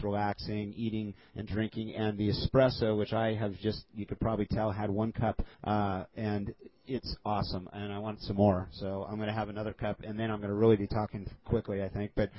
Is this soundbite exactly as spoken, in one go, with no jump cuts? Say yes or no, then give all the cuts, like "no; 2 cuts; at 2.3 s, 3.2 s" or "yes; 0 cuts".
no; 2 cuts; at 5.5 s, 6.8 s